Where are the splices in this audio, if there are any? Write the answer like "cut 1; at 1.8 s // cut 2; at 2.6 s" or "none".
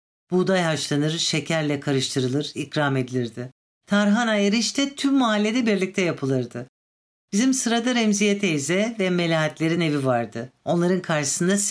none